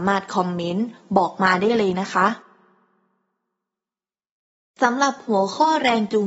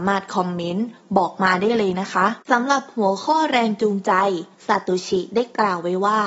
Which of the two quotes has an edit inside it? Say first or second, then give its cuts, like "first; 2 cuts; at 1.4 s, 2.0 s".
second; 2 cuts; at 2.4 s, 4.5 s